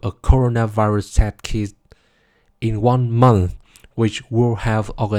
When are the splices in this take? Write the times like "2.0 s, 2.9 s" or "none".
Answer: none

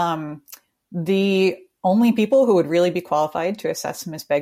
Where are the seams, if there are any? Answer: none

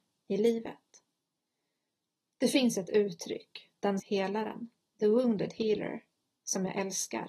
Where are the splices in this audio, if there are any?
4.0 s

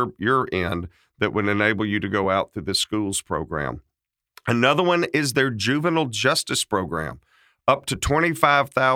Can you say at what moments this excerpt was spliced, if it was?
none

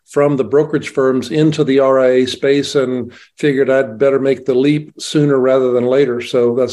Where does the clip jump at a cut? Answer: none

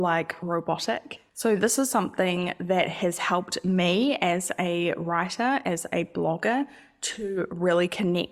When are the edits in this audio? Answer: none

